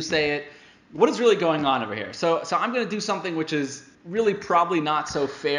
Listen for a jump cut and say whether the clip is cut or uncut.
cut